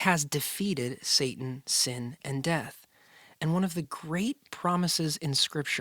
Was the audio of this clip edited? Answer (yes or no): no